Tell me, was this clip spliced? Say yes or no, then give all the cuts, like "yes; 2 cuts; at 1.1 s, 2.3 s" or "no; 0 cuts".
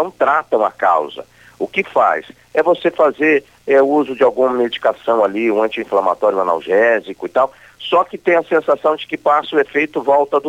no; 0 cuts